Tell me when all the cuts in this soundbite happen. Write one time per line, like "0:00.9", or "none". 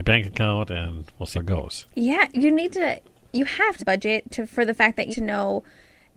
0:01.3
0:03.8
0:05.1